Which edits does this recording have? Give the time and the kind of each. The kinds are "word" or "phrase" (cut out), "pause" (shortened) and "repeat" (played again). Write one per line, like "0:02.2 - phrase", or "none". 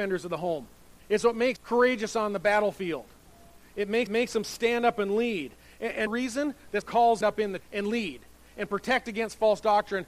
0:01.0 - pause
0:01.6 - word
0:04.1 - repeat
0:06.1 - phrase
0:06.8 - word
0:07.2 - phrase
0:07.6 - word